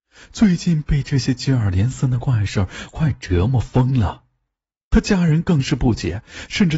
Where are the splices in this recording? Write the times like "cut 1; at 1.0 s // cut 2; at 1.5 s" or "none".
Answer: none